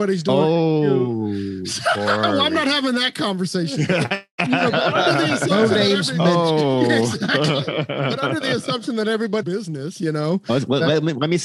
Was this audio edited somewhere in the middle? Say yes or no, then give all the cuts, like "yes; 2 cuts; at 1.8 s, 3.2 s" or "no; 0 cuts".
yes; 1 cut; at 9.4 s